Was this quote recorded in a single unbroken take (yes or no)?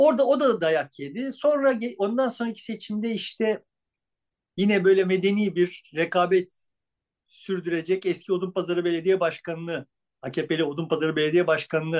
yes